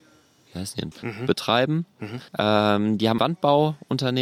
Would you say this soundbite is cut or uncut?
cut